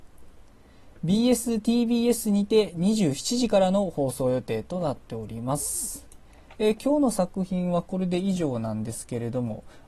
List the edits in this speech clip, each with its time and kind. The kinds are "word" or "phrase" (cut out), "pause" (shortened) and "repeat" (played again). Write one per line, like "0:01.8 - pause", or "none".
none